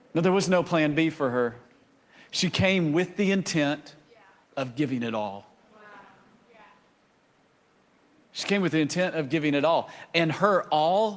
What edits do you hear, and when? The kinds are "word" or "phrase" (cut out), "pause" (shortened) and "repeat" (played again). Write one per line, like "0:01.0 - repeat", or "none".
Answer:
none